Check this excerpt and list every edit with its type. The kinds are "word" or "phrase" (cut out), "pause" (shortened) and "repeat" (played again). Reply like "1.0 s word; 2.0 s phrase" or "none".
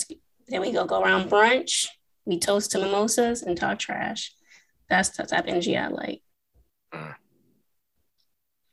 none